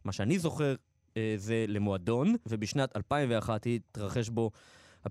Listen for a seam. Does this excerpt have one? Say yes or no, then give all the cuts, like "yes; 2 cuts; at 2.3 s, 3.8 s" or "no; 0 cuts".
no; 0 cuts